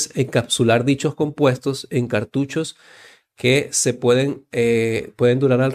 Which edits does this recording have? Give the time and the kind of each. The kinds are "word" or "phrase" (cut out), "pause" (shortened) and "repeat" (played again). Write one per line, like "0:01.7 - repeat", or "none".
none